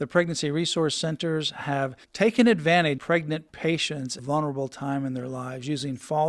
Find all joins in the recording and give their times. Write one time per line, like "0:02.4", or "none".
0:02.0
0:03.0
0:04.2